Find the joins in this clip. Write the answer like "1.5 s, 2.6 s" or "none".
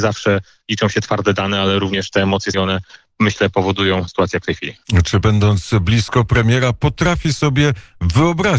2.5 s, 4.1 s, 5.2 s